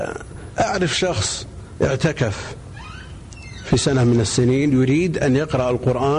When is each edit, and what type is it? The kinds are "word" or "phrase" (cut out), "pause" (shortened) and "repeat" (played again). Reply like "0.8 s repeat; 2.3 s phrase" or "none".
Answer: none